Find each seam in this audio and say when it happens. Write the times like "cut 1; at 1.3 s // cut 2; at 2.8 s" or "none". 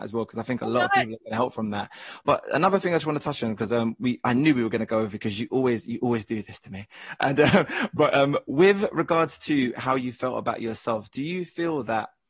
none